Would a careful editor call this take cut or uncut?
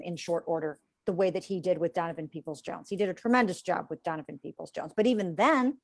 uncut